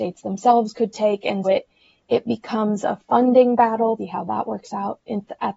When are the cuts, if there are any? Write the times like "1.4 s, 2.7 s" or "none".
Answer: 1.4 s, 4.0 s